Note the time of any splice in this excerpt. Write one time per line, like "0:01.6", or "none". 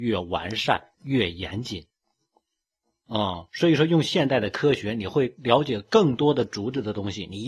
0:00.9